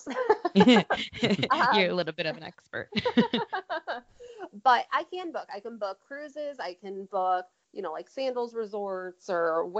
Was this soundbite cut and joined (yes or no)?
no